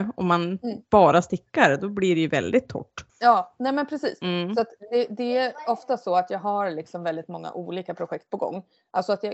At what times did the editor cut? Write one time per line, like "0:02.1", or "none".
0:03.1